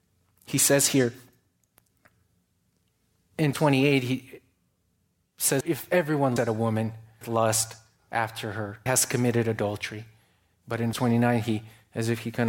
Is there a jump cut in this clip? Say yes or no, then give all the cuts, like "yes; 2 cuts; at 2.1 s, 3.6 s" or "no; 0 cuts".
yes; 6 cuts; at 3.5 s, 5.6 s, 6.4 s, 7.2 s, 8.9 s, 10.9 s